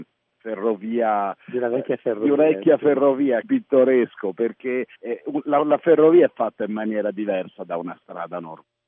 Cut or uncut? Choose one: cut